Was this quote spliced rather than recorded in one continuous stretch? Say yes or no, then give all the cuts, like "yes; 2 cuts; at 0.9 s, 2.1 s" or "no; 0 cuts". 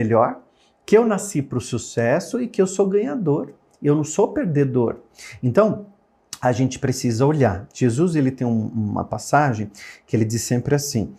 no; 0 cuts